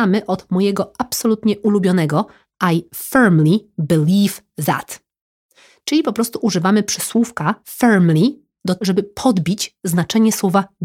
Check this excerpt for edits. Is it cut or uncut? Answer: cut